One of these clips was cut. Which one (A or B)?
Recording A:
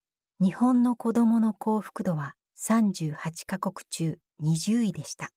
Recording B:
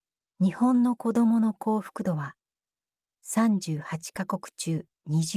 A